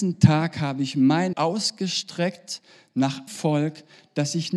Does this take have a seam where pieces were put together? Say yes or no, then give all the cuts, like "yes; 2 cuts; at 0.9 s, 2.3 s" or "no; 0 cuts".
yes; 2 cuts; at 1.3 s, 3.3 s